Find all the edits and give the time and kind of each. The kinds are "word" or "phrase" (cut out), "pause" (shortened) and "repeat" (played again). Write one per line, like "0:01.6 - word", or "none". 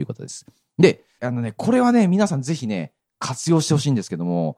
0:01.2 - word